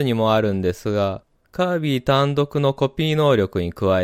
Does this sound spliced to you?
no; 0 cuts

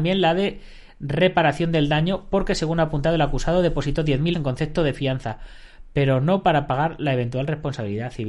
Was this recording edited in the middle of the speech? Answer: yes; 1 cut; at 4.3 s

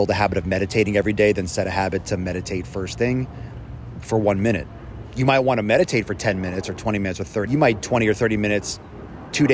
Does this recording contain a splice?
yes; 2 cuts; at 7.5 s, 7.8 s

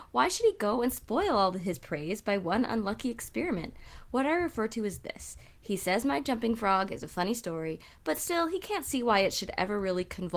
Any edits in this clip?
no; 0 cuts

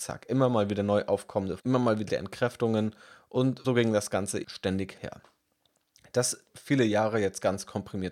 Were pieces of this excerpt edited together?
yes; 6 cuts; at 1.6 s, 2.1 s, 3.6 s, 4.4 s, 5.0 s, 6.5 s

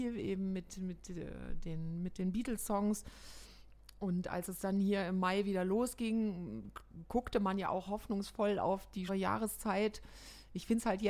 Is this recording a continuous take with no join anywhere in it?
no; 1 cut; at 9.1 s

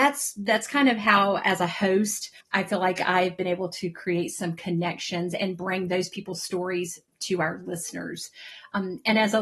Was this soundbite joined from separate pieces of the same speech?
yes; 1 cut; at 2.4 s

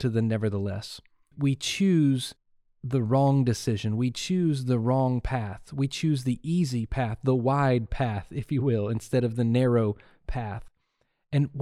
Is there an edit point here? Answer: no; 0 cuts

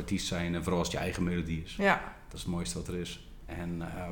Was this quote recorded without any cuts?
yes; 0 cuts

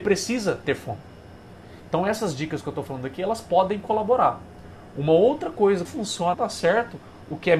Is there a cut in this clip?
yes; 2 cuts; at 5.8 s, 6.3 s

